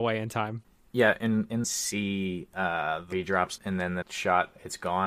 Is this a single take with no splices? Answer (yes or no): no